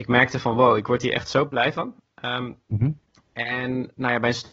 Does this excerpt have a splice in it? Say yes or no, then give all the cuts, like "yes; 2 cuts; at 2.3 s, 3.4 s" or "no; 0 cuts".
no; 0 cuts